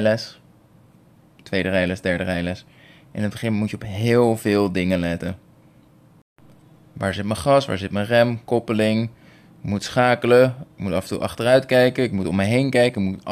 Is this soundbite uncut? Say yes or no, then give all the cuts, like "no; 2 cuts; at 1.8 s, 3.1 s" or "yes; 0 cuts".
yes; 0 cuts